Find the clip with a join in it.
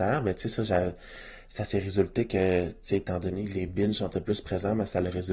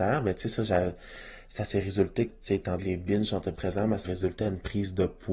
second; 4 cuts; at 2.3 s, 2.8 s, 3.5 s, 4.0 s

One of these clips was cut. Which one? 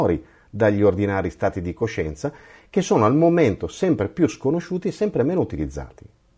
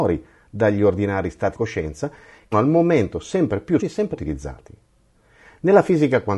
second; 4 cuts; at 1.5 s, 2.5 s, 3.8 s, 4.1 s

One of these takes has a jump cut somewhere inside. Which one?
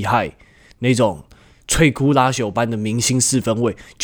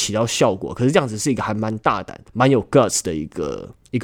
second; 1 cut; at 2.3 s

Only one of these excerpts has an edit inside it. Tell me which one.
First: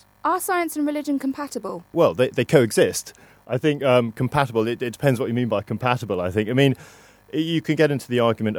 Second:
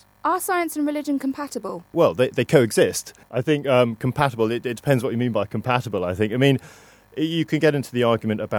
second; 1 cut; at 3.2 s

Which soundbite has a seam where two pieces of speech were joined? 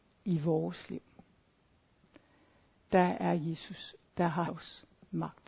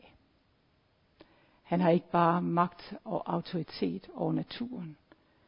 first; 3 cuts; at 2.7 s, 4.0 s, 4.5 s

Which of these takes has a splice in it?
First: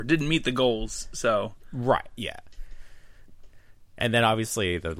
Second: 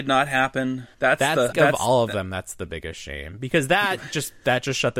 second; 2 cuts; at 0.9 s, 1.5 s

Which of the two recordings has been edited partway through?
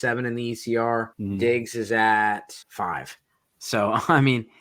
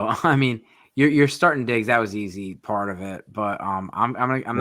first; 2 cuts; at 1.1 s, 2.6 s

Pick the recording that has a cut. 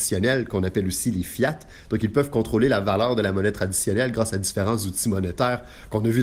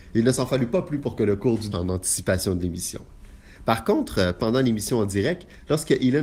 second; 1 cut; at 1.7 s

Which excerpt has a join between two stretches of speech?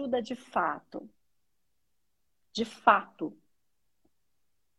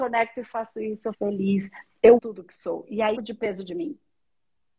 second; 3 cuts; at 1.1 s, 2.2 s, 3.2 s

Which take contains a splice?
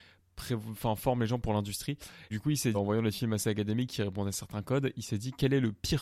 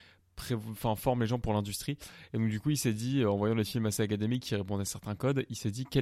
first; 2 cuts; at 2.3 s, 2.7 s

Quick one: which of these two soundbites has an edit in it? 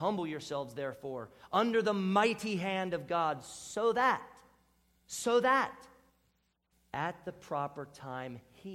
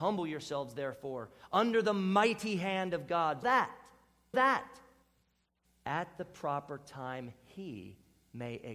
second; 2 cuts; at 3.4 s, 4.3 s

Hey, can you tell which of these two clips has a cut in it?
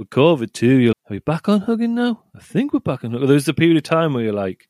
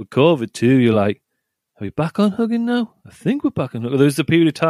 first; 1 cut; at 0.9 s

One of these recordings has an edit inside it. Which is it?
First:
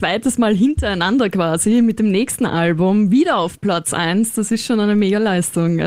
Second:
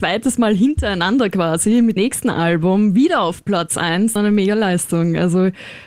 second; 2 cuts; at 2.0 s, 4.2 s

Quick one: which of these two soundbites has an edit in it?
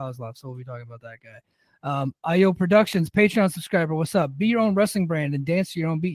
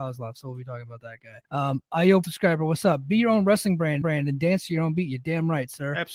second; 3 cuts; at 1.4 s, 2.2 s, 4.0 s

